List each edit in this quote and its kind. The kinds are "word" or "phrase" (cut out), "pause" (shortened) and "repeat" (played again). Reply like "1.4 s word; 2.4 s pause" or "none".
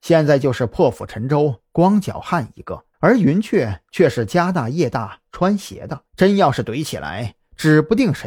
2.9 s pause; 6.1 s pause